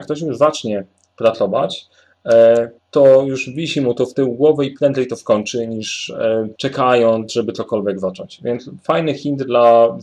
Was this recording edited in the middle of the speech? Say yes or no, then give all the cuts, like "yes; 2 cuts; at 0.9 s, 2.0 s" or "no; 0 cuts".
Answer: yes; 2 cuts; at 2.8 s, 6.6 s